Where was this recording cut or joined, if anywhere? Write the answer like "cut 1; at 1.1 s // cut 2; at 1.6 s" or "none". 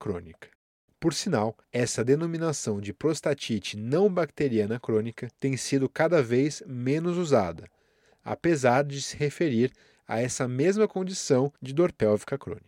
cut 1; at 1.6 s // cut 2; at 5.3 s // cut 3; at 11.6 s